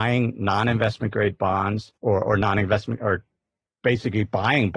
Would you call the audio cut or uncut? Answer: cut